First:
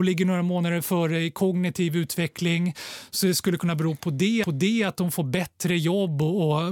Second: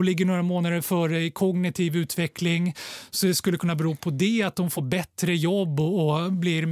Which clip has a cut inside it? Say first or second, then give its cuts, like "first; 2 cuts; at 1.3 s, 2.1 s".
first; 1 cut; at 4.4 s